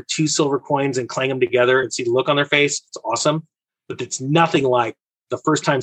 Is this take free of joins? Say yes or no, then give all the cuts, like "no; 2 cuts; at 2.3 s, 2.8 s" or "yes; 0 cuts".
yes; 0 cuts